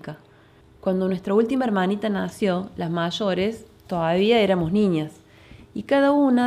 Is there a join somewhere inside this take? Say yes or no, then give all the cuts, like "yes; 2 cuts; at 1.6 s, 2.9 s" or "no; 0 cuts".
no; 0 cuts